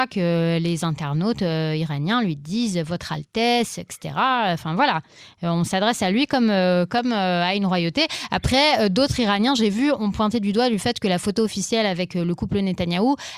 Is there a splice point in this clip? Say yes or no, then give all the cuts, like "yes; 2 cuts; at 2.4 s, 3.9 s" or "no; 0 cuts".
no; 0 cuts